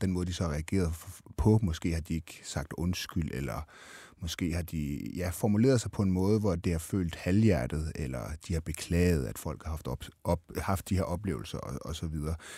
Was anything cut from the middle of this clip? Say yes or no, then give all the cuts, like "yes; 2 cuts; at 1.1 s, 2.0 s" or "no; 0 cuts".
no; 0 cuts